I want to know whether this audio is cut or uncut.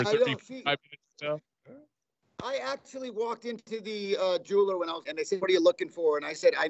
cut